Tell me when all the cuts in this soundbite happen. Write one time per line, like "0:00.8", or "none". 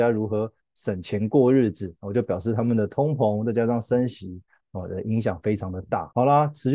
none